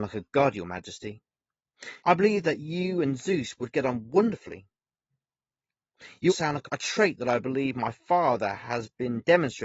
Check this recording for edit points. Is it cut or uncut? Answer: cut